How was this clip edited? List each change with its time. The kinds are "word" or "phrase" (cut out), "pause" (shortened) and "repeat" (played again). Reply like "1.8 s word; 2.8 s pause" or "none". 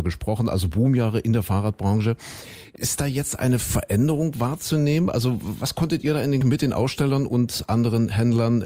6.4 s word